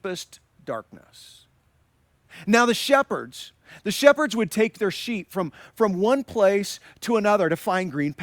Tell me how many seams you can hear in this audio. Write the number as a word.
zero